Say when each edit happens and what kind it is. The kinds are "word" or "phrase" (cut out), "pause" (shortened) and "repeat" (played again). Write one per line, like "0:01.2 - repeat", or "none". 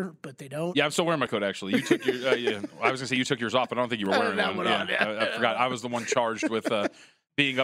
0:01.3 - word

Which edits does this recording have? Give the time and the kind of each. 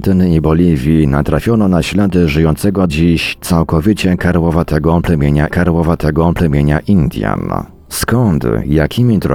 0:02.9 - word
0:05.5 - repeat

